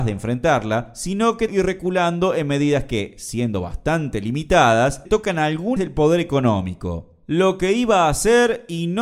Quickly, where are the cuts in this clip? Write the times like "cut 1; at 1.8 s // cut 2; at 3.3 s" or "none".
cut 1; at 1.5 s // cut 2; at 5.0 s // cut 3; at 5.8 s